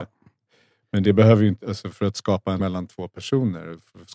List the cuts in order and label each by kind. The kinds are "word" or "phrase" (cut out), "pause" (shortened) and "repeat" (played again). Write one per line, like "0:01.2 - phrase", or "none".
0:01.6 - word
0:02.6 - word

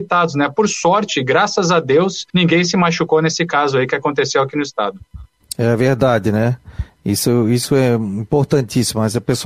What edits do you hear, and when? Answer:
0:02.3 - pause

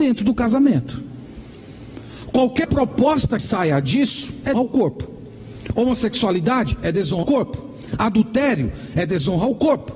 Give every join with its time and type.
0:02.6 - word
0:03.4 - word
0:04.5 - word
0:07.2 - word

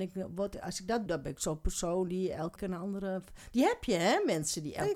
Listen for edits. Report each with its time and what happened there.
0:01.1 - word
0:02.6 - word

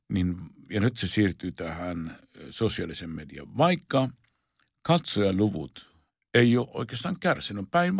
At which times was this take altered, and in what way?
0:06.1 - pause

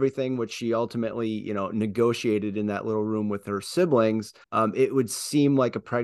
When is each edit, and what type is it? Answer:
0:04.4 - pause

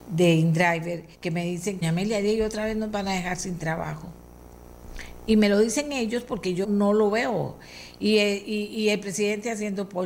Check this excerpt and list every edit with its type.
0:01.1 - pause
0:01.8 - phrase
0:06.6 - word

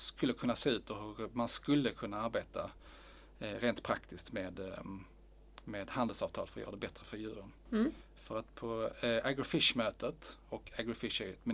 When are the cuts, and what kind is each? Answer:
none

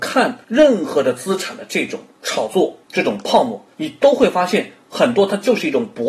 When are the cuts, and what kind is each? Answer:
0:03.7 - pause

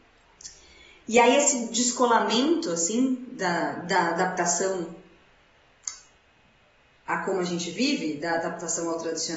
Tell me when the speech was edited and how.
none

